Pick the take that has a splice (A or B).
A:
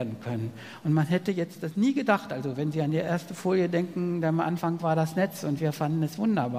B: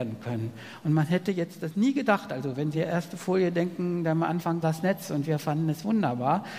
B